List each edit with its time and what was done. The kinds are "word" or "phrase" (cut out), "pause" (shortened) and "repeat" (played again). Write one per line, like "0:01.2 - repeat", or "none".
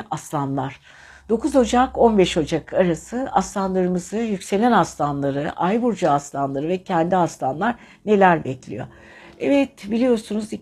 none